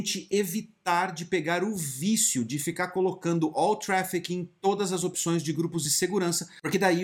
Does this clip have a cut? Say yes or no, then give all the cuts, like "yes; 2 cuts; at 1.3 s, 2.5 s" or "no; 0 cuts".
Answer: no; 0 cuts